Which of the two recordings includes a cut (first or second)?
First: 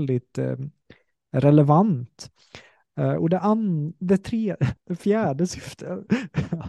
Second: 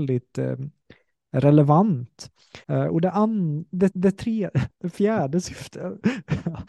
second